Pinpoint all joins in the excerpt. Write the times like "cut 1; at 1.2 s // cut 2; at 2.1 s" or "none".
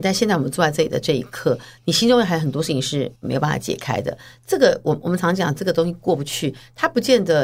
cut 1; at 3.2 s